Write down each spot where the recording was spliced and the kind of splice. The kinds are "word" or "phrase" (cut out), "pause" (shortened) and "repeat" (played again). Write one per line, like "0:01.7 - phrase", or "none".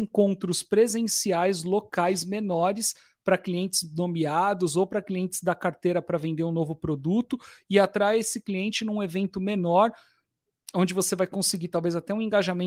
none